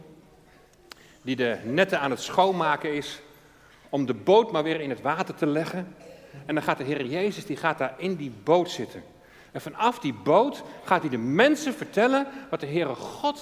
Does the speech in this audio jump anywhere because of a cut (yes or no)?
no